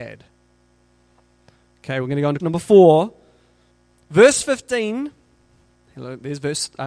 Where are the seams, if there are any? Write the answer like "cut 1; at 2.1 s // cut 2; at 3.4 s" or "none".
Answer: cut 1; at 2.4 s